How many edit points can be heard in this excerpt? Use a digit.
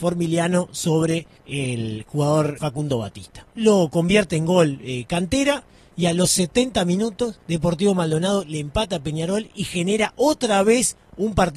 4